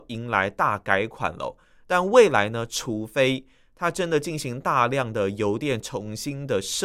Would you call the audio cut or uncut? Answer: uncut